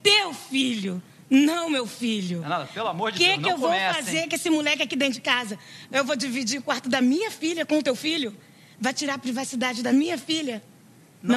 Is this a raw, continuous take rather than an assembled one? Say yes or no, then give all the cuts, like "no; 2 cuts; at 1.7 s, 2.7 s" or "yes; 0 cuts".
yes; 0 cuts